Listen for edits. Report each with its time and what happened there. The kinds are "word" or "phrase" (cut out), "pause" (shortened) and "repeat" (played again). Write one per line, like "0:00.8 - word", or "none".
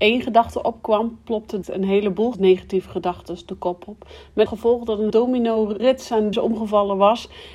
0:01.6 - word
0:02.3 - word
0:04.5 - word
0:05.1 - word
0:05.8 - word
0:06.3 - word